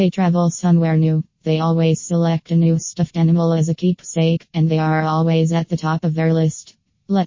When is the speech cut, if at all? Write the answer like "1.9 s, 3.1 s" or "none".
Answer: none